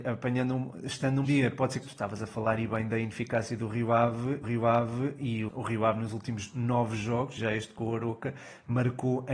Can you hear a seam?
yes; 5 cuts; at 1.2 s, 1.8 s, 4.4 s, 5.5 s, 7.4 s

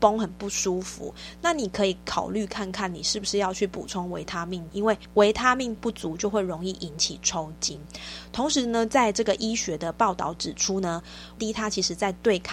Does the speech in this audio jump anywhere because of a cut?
yes; 3 cuts; at 4.7 s, 5.8 s, 11.4 s

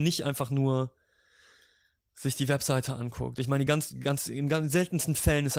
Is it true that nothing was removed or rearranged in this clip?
yes; 0 cuts

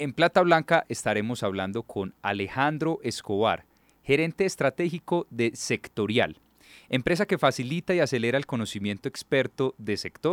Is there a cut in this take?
no; 0 cuts

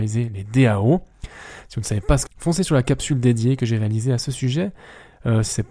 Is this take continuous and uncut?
no; 1 cut; at 2.3 s

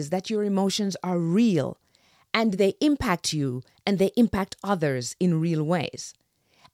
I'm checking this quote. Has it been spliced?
no; 0 cuts

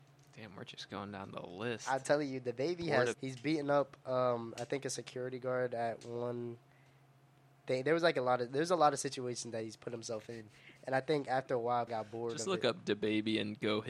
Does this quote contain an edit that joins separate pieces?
yes; 2 cuts; at 3.1 s, 11.9 s

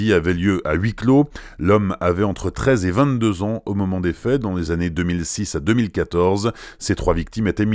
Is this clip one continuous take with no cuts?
yes; 0 cuts

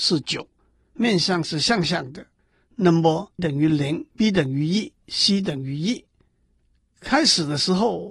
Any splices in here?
yes; 2 cuts; at 3.4 s, 4.1 s

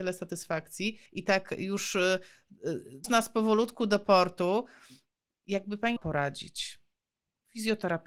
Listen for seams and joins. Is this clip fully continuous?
no; 3 cuts; at 1.1 s, 3.0 s, 6.0 s

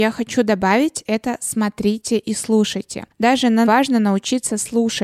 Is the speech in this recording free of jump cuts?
no; 1 cut; at 3.6 s

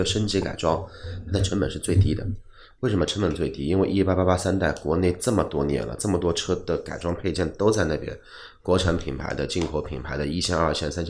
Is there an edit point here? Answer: no; 0 cuts

